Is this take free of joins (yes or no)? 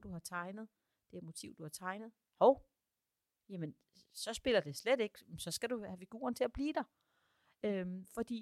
yes